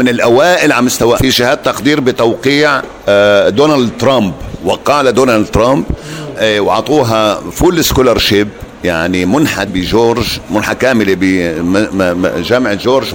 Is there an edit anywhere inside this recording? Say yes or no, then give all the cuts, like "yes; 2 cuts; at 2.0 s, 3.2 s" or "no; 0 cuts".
yes; 3 cuts; at 1.2 s, 6.4 s, 9.7 s